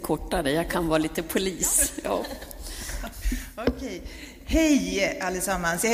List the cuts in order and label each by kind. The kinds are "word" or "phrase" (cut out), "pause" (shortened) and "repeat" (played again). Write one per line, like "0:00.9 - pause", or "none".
none